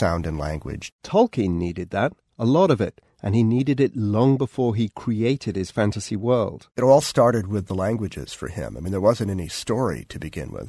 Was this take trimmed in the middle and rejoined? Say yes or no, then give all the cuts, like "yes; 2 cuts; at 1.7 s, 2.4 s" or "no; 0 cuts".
no; 0 cuts